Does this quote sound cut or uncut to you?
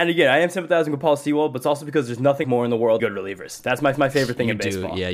cut